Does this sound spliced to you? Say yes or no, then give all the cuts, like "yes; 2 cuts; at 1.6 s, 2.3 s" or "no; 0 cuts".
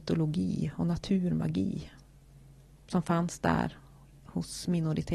no; 0 cuts